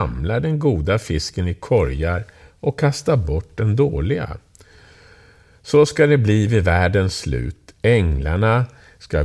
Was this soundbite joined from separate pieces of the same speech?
no; 0 cuts

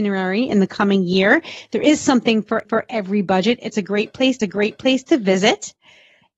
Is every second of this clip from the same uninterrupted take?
no; 2 cuts; at 2.6 s, 4.4 s

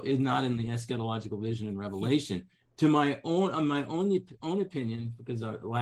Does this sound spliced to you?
no; 0 cuts

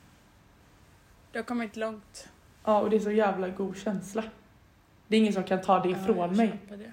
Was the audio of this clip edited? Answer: no; 0 cuts

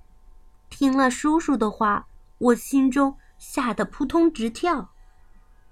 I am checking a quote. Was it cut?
yes; 1 cut; at 2.1 s

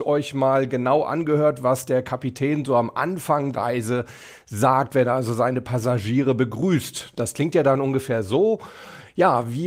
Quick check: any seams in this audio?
yes; 1 cut; at 3.5 s

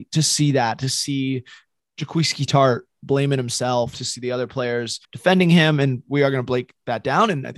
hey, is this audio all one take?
no; 1 cut; at 5.0 s

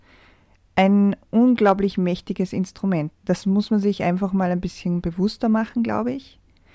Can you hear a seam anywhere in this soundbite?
yes; 1 cut; at 3.2 s

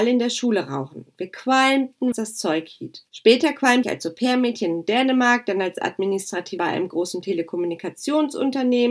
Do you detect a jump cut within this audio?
yes; 4 cuts; at 2.1 s, 3.1 s, 3.8 s, 6.6 s

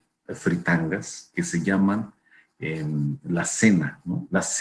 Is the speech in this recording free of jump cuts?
yes; 0 cuts

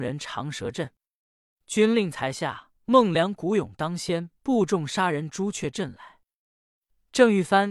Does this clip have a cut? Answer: yes; 2 cuts; at 2.8 s, 4.4 s

